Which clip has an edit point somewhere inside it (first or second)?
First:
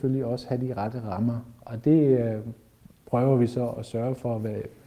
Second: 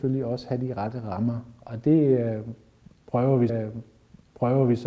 second